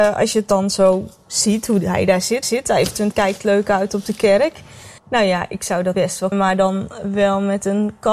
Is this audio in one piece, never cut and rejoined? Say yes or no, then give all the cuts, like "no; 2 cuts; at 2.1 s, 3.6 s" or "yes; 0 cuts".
no; 5 cuts; at 2.4 s, 3.1 s, 5.0 s, 5.9 s, 6.3 s